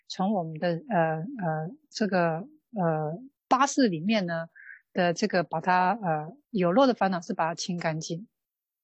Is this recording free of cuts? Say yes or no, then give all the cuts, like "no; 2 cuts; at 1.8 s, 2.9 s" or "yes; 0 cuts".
no; 2 cuts; at 3.4 s, 6.4 s